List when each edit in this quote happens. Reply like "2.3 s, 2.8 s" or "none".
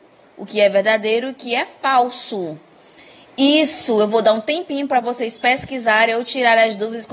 none